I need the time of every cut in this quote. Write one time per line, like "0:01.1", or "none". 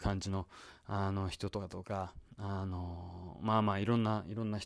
none